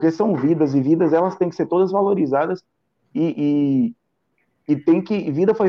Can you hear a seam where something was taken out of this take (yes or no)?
no